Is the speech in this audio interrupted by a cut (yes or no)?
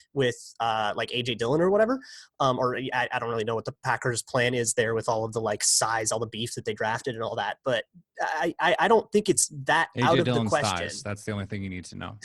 no